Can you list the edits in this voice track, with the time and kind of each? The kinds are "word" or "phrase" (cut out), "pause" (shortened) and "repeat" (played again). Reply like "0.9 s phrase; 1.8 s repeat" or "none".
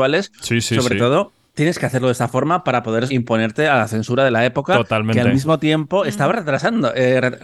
1.5 s pause; 3.1 s word